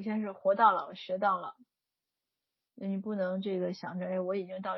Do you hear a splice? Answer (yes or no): no